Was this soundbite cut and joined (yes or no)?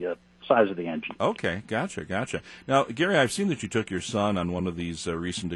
no